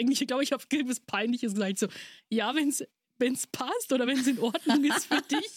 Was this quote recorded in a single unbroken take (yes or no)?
yes